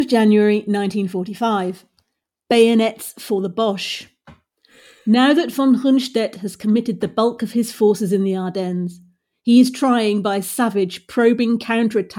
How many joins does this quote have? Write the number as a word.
zero